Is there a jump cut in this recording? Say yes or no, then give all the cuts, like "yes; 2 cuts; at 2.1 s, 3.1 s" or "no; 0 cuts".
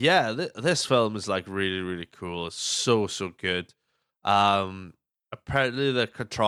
no; 0 cuts